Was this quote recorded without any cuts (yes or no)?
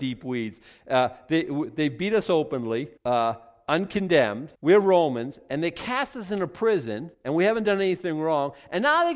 no